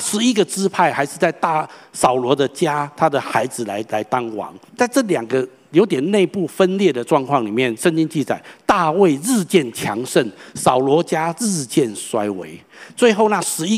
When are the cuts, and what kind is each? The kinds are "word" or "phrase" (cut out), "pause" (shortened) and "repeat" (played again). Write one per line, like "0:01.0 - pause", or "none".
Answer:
0:04.7 - pause